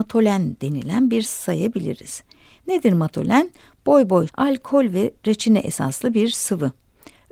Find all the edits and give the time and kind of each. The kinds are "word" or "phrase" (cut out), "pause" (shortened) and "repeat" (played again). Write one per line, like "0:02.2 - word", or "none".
0:01.2 - word
0:04.3 - phrase